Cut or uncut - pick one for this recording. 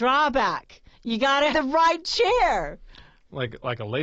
cut